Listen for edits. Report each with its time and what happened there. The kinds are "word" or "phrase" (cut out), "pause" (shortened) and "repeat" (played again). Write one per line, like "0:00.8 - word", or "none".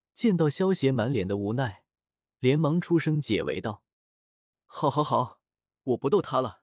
none